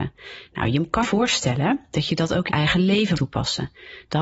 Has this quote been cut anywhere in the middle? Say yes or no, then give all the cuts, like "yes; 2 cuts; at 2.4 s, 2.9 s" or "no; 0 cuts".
yes; 3 cuts; at 1.0 s, 2.5 s, 3.1 s